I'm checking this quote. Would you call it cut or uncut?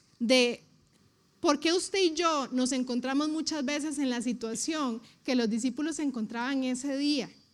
cut